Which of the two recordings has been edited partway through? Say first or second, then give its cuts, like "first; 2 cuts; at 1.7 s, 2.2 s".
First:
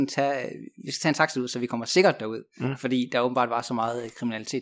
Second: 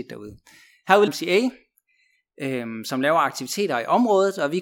second; 1 cut; at 1.1 s